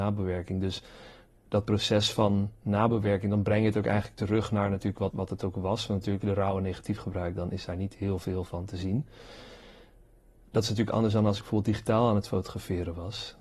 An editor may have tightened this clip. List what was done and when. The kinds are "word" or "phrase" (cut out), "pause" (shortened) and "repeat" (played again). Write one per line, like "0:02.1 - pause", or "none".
0:05.1 - word
0:06.2 - word